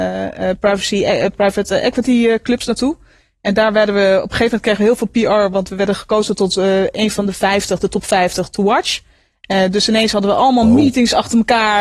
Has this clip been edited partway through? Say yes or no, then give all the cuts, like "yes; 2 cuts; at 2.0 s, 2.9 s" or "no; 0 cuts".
no; 0 cuts